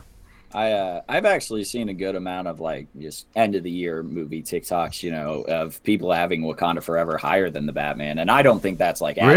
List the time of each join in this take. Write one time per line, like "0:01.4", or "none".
0:02.9